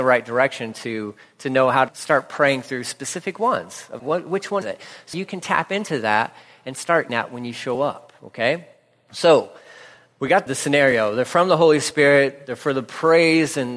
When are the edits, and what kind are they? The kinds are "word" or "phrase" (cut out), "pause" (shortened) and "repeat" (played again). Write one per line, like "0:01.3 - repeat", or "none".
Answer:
0:01.9 - word
0:04.0 - word
0:04.6 - word
0:05.1 - word
0:07.1 - word
0:10.5 - word